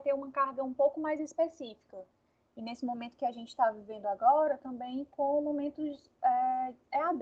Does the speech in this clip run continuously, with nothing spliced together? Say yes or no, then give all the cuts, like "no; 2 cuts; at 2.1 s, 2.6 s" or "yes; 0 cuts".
yes; 0 cuts